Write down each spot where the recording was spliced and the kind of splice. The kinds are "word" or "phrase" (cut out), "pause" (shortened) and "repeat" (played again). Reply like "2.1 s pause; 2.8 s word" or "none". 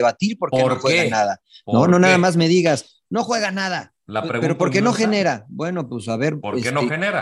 none